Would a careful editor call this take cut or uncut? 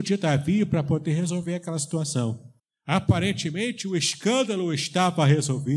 cut